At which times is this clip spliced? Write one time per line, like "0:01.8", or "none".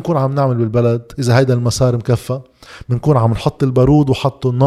none